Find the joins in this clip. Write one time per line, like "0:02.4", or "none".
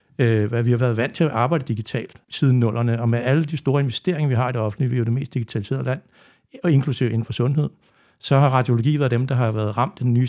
0:02.2